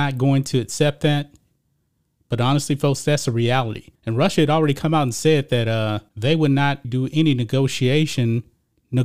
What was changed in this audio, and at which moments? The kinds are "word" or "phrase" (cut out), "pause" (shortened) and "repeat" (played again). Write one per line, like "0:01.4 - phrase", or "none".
0:04.0 - pause
0:06.1 - pause
0:06.8 - word